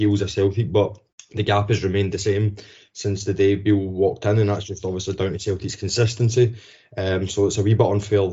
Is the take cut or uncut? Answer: uncut